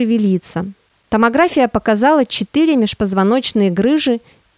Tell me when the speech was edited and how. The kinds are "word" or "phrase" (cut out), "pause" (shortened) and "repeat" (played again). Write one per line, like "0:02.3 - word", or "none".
none